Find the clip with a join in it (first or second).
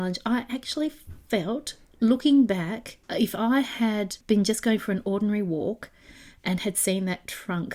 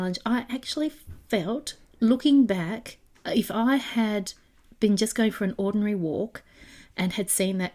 first